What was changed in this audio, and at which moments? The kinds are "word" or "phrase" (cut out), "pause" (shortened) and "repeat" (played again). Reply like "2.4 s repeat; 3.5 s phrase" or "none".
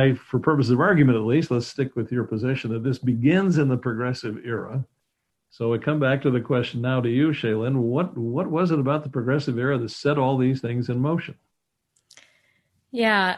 none